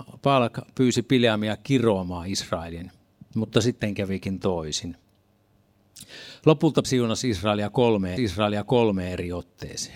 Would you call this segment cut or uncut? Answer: cut